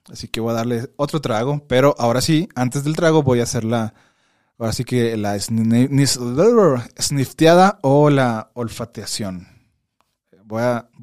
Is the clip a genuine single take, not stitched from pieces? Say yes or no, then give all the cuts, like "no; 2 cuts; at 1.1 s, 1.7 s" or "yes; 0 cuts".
yes; 0 cuts